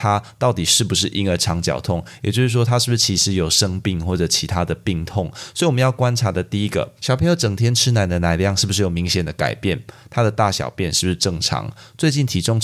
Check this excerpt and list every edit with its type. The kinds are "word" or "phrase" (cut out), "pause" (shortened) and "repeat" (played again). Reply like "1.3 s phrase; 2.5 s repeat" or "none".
7.0 s pause